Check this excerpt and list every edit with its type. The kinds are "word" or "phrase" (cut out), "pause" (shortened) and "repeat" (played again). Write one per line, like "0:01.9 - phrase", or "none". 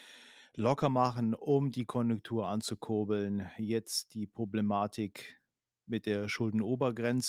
none